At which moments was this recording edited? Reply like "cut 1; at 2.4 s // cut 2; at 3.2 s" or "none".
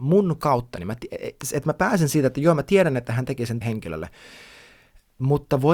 cut 1; at 3.6 s

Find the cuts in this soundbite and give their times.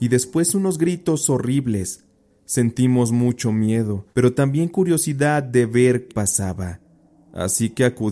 cut 1; at 4.1 s // cut 2; at 6.1 s

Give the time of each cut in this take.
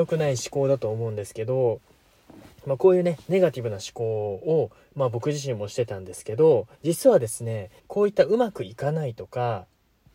cut 1; at 6.7 s // cut 2; at 7.8 s

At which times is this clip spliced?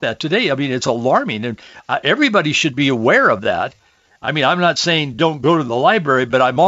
none

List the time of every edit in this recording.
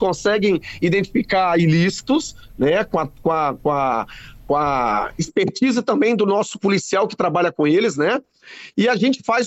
none

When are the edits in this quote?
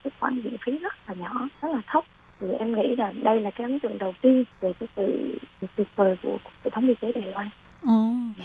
cut 1; at 1.5 s // cut 2; at 4.5 s

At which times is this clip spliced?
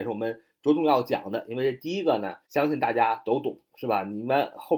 cut 1; at 2.4 s

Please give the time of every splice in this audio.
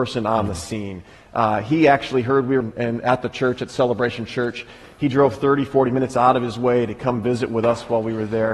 cut 1; at 2.6 s

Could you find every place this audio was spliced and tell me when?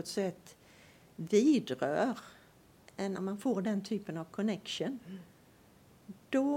cut 1; at 3.2 s

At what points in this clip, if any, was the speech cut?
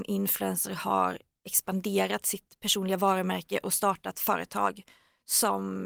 none

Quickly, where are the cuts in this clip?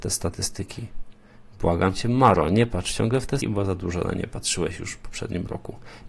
cut 1; at 3.4 s

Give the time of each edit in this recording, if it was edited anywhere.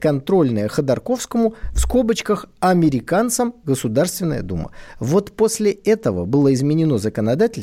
none

